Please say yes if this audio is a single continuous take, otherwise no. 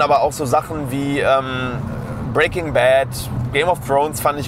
yes